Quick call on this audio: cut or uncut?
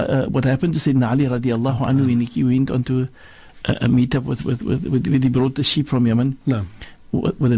uncut